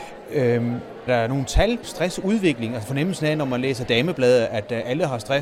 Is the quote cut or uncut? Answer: cut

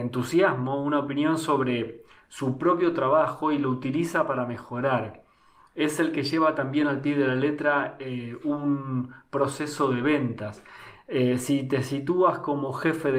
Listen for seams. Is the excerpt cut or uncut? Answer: uncut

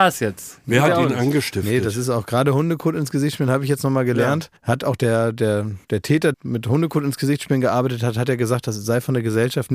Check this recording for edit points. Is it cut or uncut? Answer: cut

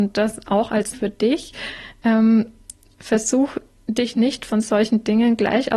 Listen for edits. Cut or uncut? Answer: cut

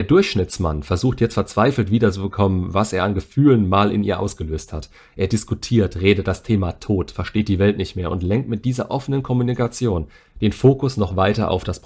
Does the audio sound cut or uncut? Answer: uncut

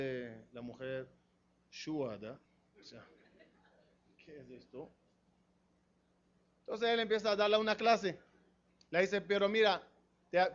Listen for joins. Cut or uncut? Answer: uncut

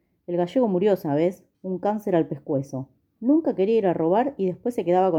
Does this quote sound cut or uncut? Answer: cut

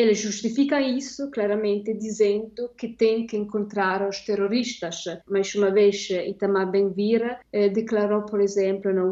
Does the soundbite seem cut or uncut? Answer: cut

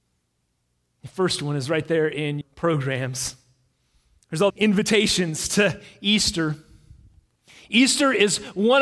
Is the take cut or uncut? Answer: cut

